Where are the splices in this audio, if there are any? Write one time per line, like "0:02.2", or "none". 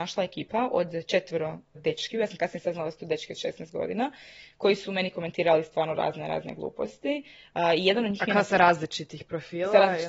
0:01.7